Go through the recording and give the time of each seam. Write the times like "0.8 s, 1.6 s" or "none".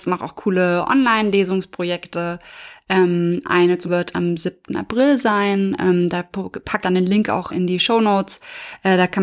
3.8 s, 6.8 s, 7.5 s